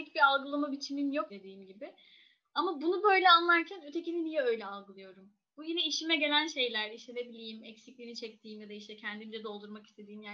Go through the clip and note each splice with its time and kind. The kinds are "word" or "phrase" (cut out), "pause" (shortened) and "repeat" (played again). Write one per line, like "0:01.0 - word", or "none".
0:01.3 - word